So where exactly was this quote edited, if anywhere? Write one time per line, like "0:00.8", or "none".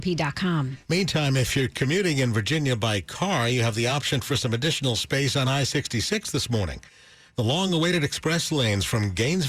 none